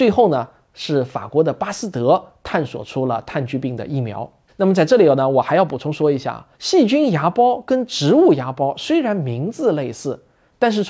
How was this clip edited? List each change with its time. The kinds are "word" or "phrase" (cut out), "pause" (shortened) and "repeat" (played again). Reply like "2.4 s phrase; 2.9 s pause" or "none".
4.5 s pause; 6.5 s pause